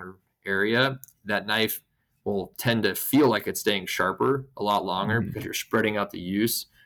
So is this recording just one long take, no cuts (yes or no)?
yes